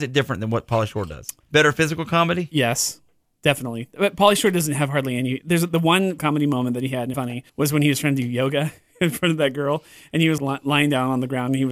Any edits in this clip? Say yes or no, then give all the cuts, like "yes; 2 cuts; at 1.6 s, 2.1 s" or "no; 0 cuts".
yes; 5 cuts; at 1.4 s, 6.2 s, 7.1 s, 7.5 s, 10.4 s